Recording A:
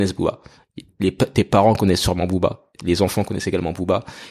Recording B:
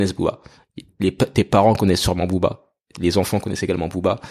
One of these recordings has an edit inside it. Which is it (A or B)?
A